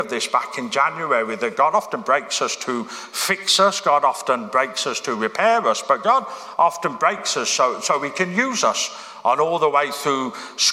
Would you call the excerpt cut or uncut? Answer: uncut